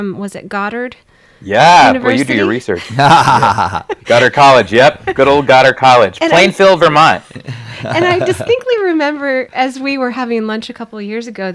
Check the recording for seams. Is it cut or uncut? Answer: uncut